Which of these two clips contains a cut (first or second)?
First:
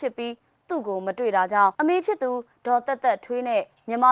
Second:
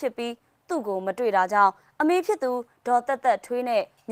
first